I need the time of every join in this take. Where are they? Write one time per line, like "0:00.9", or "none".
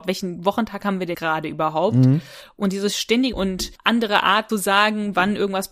0:01.1
0:03.3
0:03.8
0:04.5